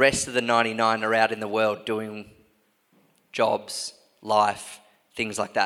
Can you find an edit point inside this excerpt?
no; 0 cuts

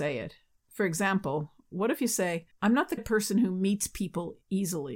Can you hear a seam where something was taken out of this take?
yes; 2 cuts; at 2.5 s, 3.0 s

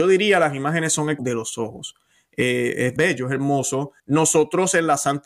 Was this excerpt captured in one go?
no; 3 cuts; at 1.2 s, 3.0 s, 4.0 s

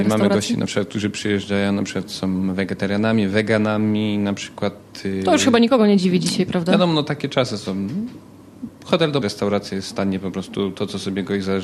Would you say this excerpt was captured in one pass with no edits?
no; 1 cut; at 9.2 s

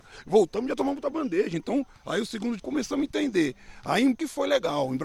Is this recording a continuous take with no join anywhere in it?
no; 3 cuts; at 1.9 s, 2.6 s, 4.1 s

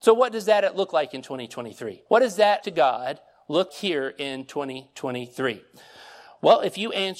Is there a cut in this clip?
yes; 3 cuts; at 2.1 s, 2.6 s, 3.7 s

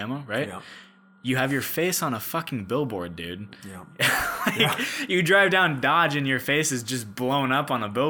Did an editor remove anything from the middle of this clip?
no; 0 cuts

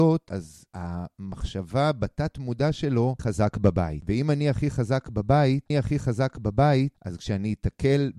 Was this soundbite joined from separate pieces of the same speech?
yes; 2 cuts; at 3.2 s, 5.7 s

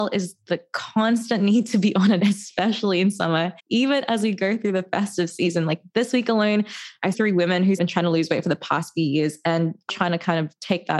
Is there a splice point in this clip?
yes; 5 cuts; at 2.2 s, 3.6 s, 7.1 s, 7.8 s, 9.9 s

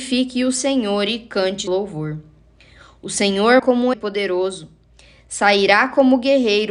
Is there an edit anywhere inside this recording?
yes; 3 cuts; at 1.7 s, 3.6 s, 3.9 s

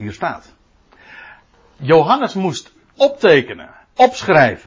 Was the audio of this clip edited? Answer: no; 0 cuts

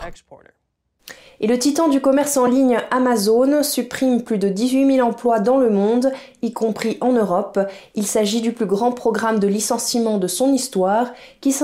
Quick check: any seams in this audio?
no; 0 cuts

